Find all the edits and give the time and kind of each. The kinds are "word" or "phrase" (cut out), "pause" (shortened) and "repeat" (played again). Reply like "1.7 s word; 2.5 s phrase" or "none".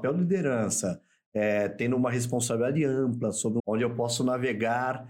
3.6 s word